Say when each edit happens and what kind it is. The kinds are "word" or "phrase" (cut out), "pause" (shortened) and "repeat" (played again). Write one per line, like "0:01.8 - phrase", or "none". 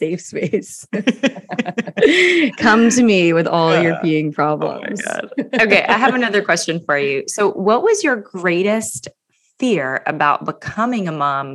none